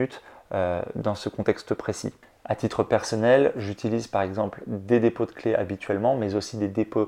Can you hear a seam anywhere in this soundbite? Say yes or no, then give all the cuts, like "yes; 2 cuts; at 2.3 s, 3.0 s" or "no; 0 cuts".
no; 0 cuts